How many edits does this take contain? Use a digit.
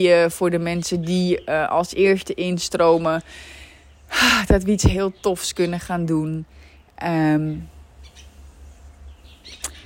0